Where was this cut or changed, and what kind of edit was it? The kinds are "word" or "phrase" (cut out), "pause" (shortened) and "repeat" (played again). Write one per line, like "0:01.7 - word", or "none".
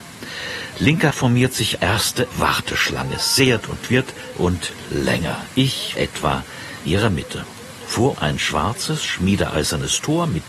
0:01.1 - word
0:01.8 - word
0:02.3 - word
0:03.6 - word
0:04.3 - word
0:05.9 - word
0:06.9 - word
0:08.1 - word